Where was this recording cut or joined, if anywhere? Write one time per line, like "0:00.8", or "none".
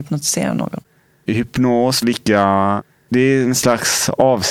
0:02.0